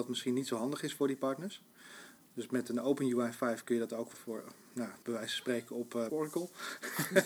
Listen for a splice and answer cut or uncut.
cut